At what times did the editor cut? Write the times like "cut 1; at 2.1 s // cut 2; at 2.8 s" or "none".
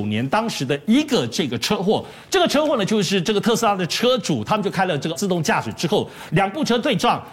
cut 1; at 5.1 s